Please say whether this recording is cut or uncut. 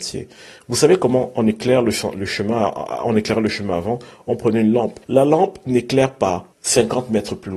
cut